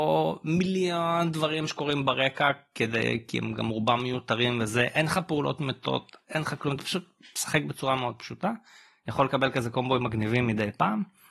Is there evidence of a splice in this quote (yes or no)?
no